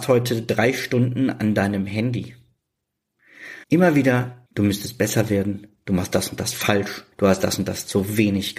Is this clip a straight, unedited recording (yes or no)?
no